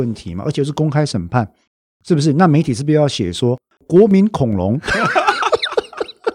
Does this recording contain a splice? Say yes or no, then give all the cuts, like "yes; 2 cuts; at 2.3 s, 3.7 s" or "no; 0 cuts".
no; 0 cuts